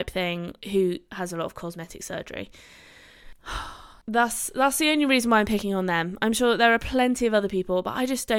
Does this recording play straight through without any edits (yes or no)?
no